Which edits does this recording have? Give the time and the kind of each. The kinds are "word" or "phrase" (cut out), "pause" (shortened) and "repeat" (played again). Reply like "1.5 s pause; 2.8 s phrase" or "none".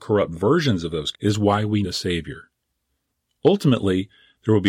1.1 s word; 1.8 s word